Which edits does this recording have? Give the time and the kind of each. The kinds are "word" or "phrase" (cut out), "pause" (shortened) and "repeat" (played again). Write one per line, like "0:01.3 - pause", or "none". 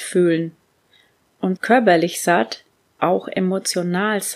0:01.6 - word
0:03.0 - word